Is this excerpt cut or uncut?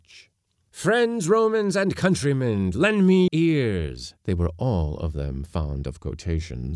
cut